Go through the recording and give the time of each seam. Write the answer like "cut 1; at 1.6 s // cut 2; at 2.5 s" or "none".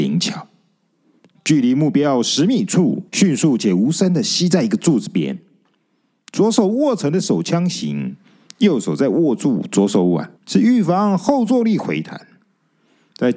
cut 1; at 3.1 s // cut 2; at 10.4 s